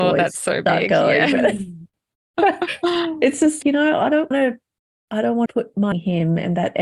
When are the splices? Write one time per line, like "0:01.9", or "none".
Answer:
0:03.6
0:04.3
0:05.5
0:05.9